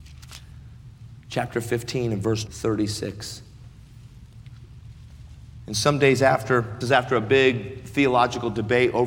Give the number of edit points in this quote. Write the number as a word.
two